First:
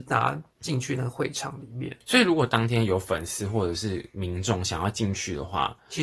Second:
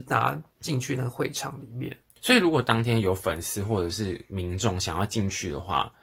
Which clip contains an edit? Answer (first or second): first